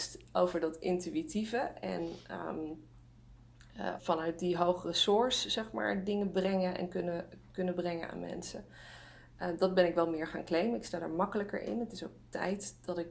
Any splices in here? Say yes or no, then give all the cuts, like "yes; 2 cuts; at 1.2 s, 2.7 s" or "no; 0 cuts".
yes; 1 cut; at 4.0 s